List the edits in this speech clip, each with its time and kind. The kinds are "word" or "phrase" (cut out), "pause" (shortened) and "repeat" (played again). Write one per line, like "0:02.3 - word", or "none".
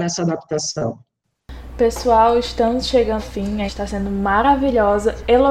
0:03.2 - word
0:03.7 - word